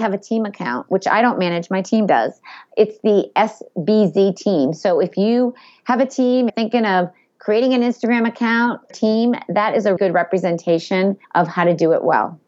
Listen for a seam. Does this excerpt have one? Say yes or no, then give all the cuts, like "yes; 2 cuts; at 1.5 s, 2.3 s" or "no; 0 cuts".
yes; 4 cuts; at 6.5 s, 8.9 s, 10.0 s, 11.2 s